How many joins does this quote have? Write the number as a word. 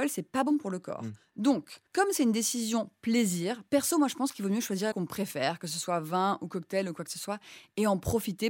two